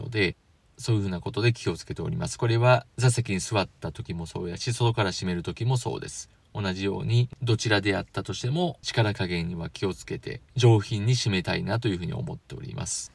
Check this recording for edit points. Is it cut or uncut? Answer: cut